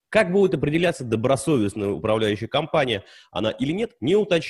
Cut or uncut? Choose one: uncut